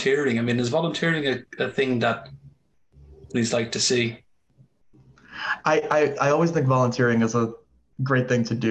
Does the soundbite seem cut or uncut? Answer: uncut